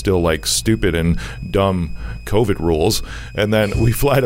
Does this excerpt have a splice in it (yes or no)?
no